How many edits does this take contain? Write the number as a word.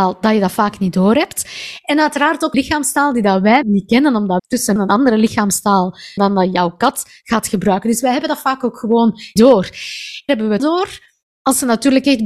eight